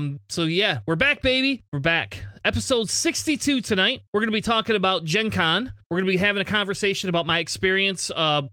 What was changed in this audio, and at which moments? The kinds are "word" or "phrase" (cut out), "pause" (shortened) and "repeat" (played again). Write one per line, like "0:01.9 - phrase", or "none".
0:01.7 - pause
0:04.1 - pause
0:05.8 - pause